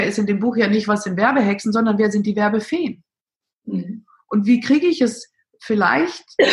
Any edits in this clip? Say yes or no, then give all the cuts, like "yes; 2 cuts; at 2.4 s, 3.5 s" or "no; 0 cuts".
no; 0 cuts